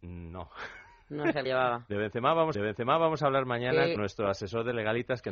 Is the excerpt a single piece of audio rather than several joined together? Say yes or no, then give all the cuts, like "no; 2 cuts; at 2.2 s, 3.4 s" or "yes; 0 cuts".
no; 3 cuts; at 1.5 s, 2.5 s, 4.0 s